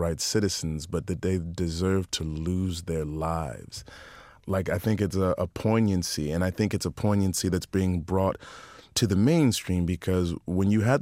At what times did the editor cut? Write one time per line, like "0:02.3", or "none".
none